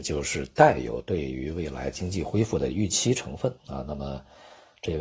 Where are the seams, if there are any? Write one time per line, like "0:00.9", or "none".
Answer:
0:03.6